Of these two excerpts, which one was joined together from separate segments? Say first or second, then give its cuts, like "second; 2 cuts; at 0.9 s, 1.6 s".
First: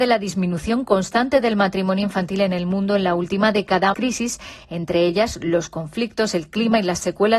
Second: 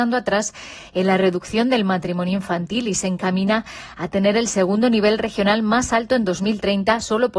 first; 1 cut; at 3.9 s